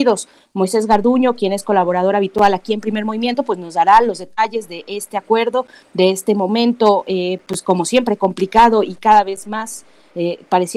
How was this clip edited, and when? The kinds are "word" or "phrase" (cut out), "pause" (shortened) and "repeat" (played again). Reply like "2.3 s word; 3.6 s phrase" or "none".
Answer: none